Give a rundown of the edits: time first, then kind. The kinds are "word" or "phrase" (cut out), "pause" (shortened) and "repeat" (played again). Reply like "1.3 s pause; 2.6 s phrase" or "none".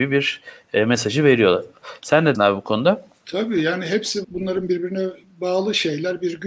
2.3 s word; 4.2 s word